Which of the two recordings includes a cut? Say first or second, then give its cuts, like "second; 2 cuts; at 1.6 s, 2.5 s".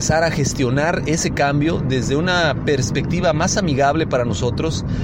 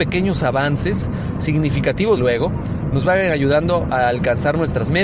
second; 1 cut; at 2.2 s